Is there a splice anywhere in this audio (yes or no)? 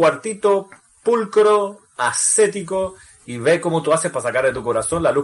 no